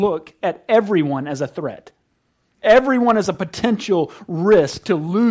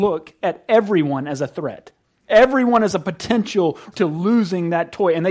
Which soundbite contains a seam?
second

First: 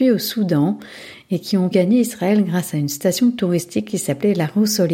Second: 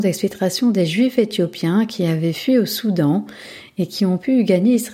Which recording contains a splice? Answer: first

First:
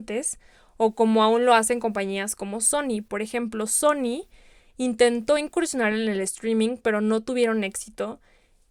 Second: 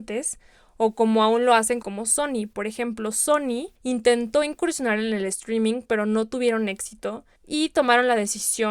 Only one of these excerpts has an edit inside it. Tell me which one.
second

